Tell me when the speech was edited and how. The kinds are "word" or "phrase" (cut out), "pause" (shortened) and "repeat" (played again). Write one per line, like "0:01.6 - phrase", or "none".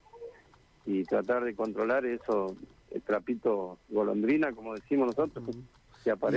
0:02.8 - pause